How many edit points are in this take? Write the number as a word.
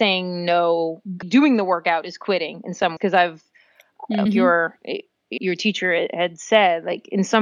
four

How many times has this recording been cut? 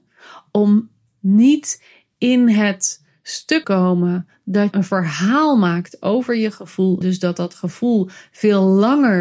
three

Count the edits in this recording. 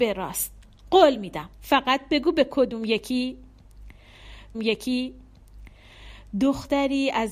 two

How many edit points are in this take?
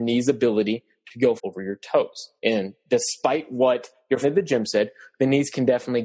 three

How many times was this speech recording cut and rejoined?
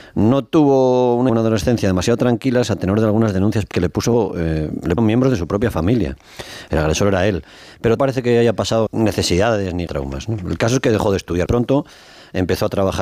seven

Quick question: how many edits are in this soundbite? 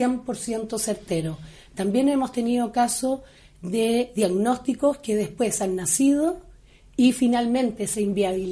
zero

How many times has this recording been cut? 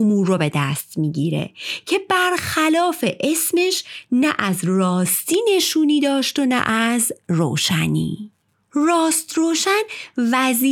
zero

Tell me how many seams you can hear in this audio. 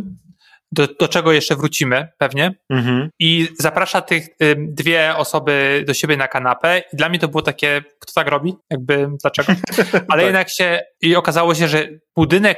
one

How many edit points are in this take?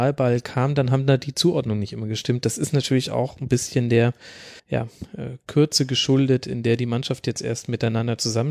one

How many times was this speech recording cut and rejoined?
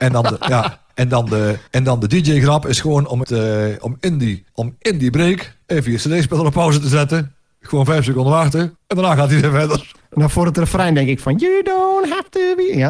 five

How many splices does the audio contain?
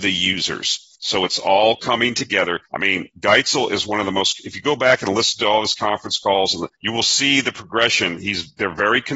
three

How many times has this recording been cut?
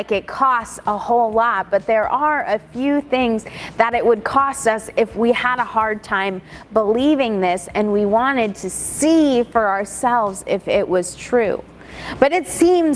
zero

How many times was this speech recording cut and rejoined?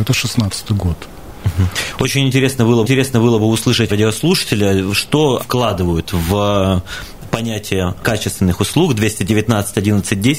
four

